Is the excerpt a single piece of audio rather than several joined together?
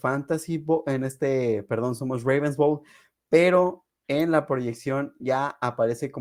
yes; 0 cuts

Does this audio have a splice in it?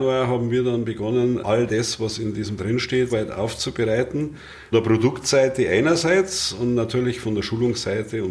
yes; 4 cuts; at 1.4 s, 2.6 s, 3.1 s, 4.7 s

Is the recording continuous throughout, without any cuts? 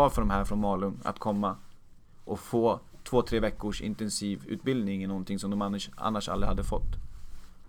yes; 0 cuts

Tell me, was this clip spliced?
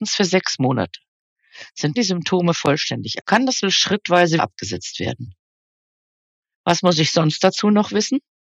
yes; 4 cuts; at 1.9 s, 3.2 s, 3.6 s, 4.4 s

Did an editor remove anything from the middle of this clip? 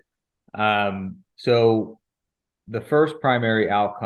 yes; 1 cut; at 1.3 s

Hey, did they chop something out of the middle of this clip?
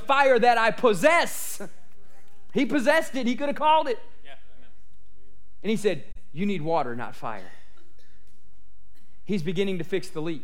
no; 0 cuts

